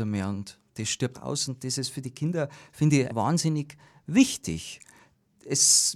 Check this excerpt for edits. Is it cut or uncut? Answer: cut